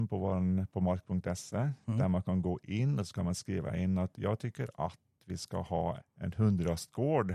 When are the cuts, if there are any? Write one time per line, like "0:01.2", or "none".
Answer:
0:06.0